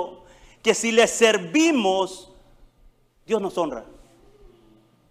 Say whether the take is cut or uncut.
uncut